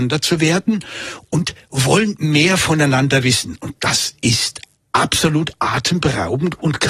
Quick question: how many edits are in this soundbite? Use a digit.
0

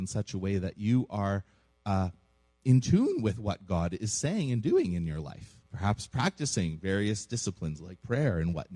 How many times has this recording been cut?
1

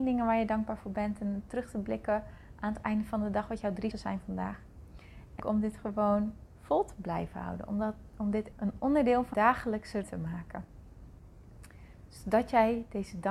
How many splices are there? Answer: 6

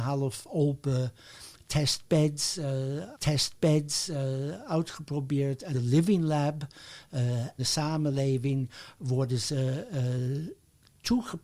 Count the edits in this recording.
3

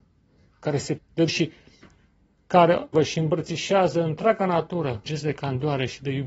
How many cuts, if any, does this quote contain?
4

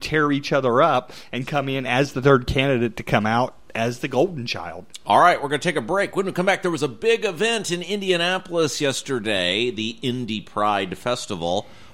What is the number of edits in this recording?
0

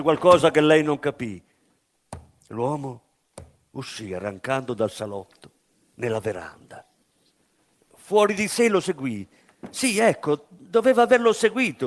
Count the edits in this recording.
0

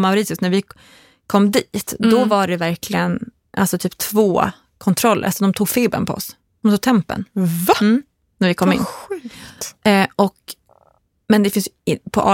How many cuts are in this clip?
0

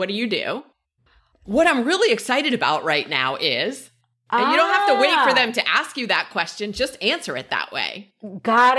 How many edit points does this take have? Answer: 0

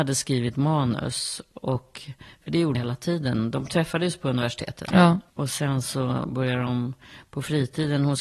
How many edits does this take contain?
2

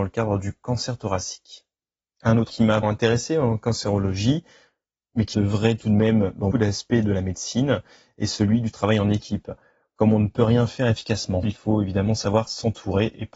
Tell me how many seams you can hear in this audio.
5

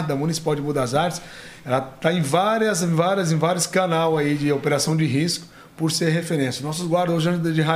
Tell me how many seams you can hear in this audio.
0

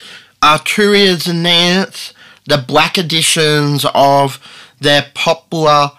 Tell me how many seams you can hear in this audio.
0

